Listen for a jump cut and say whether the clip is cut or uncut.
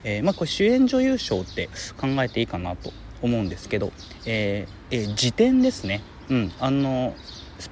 cut